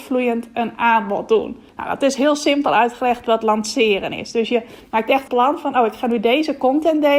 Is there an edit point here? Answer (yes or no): yes